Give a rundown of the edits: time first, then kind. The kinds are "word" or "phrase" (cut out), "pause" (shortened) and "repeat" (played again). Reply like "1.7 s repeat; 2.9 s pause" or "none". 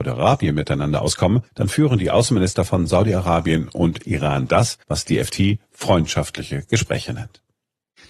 1.5 s pause; 4.8 s pause